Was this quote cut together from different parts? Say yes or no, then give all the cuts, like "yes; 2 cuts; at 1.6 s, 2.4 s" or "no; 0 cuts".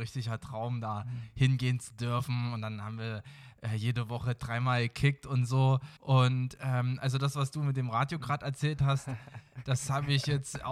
yes; 1 cut; at 6.0 s